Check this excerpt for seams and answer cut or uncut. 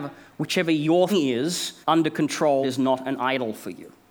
cut